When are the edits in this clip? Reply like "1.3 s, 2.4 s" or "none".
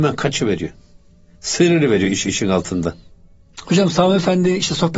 2.3 s

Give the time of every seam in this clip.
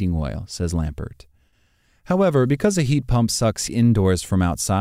3.7 s

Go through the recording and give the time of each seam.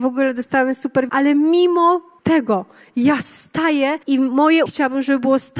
1.1 s, 2.2 s, 4.0 s, 4.7 s

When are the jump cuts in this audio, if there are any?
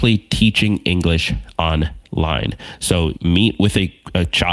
3.2 s

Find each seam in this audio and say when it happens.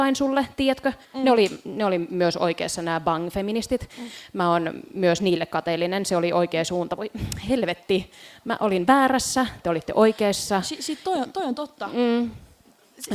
1.0 s

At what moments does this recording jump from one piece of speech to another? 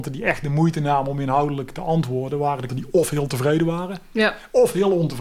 2.7 s

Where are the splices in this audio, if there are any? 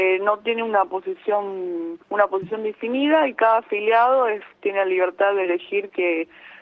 2.0 s

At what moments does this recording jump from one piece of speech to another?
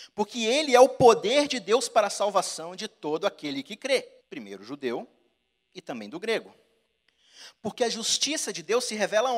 4.2 s

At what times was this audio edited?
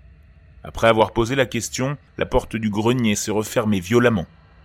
2.1 s

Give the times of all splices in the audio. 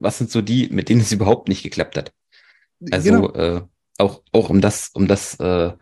4.5 s

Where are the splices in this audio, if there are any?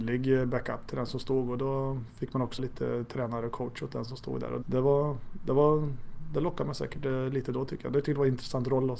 2.6 s, 4.6 s

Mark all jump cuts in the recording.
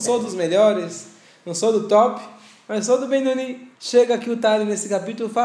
3.8 s

